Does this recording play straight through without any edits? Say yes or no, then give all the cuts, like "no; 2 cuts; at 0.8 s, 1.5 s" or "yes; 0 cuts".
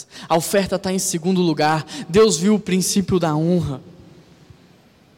yes; 0 cuts